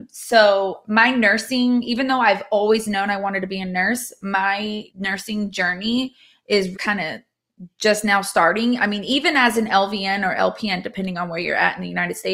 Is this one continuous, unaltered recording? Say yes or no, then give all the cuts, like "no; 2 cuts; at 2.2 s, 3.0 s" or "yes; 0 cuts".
no; 2 cuts; at 4.9 s, 6.7 s